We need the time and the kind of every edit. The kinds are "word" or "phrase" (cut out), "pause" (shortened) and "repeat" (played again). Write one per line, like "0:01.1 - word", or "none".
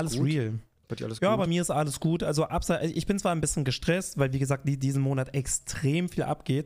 none